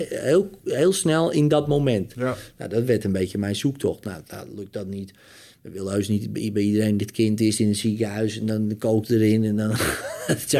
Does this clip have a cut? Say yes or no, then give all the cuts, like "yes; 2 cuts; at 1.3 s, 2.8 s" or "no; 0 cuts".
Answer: no; 0 cuts